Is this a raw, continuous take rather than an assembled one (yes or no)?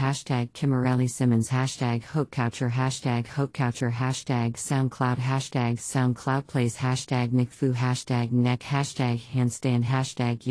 yes